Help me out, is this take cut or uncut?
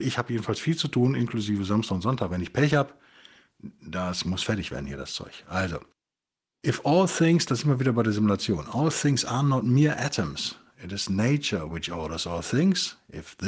uncut